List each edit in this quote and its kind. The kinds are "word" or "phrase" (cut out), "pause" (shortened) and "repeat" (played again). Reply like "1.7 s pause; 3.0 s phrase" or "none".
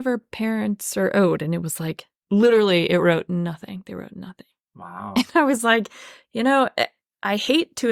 none